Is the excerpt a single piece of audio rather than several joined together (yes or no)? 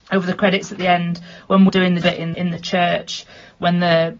no